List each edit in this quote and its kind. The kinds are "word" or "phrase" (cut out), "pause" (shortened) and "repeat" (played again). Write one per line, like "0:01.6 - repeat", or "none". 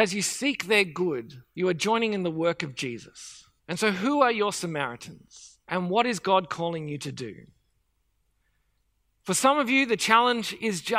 0:01.5 - pause
0:03.6 - pause
0:05.6 - pause